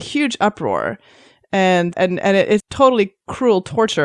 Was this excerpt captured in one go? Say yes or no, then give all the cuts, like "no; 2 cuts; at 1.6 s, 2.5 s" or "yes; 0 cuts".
no; 2 cuts; at 1.9 s, 2.6 s